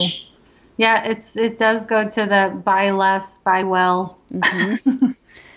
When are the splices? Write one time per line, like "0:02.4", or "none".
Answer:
none